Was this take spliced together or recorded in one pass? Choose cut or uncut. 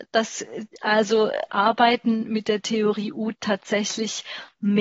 uncut